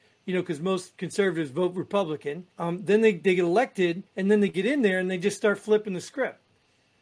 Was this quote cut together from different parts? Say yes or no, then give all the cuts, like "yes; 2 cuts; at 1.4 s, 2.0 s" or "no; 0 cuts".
yes; 2 cuts; at 2.5 s, 4.1 s